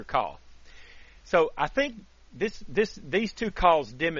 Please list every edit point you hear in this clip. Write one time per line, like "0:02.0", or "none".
none